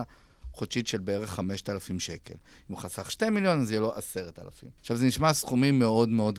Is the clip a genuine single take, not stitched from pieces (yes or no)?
no